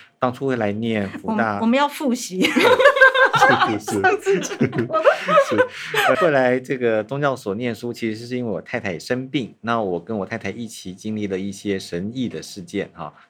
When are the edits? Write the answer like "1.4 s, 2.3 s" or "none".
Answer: 6.1 s